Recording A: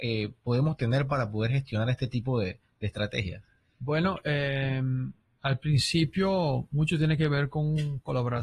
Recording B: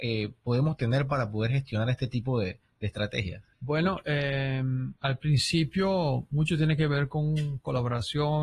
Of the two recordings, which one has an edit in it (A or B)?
B